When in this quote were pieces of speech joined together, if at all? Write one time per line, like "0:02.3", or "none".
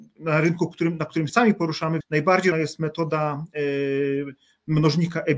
0:01.3
0:02.0
0:02.5